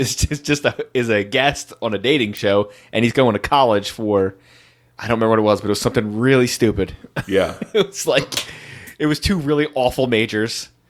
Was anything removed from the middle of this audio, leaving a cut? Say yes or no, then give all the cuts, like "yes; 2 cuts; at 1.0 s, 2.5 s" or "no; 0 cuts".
no; 0 cuts